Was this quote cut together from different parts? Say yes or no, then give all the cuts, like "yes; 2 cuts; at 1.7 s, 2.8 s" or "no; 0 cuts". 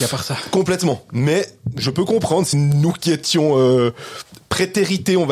yes; 1 cut; at 2.5 s